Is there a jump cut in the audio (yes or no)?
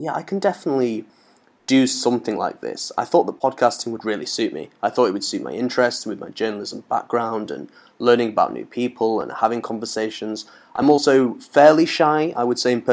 no